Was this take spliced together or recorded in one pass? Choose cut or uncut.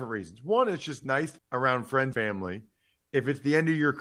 cut